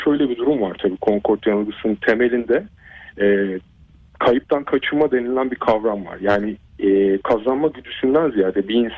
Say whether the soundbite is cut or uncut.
uncut